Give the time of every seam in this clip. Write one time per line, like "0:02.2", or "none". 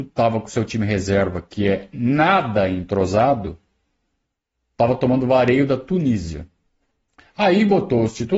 none